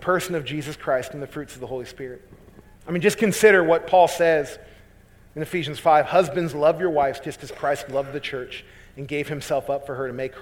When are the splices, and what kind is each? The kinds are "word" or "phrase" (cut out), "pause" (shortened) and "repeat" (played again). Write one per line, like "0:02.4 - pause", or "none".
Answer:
0:02.8 - pause